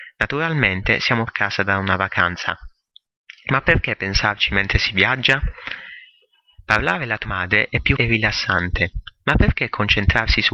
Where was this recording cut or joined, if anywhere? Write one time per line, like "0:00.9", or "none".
0:01.3
0:07.3
0:08.0